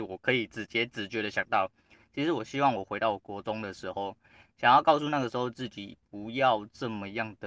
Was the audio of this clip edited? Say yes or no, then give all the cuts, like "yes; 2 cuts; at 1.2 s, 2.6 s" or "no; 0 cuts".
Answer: no; 0 cuts